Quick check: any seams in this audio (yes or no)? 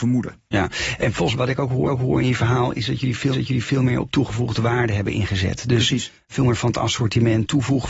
yes